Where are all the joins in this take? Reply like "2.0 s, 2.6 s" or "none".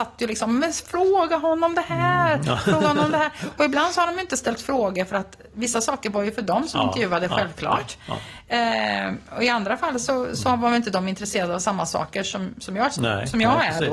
none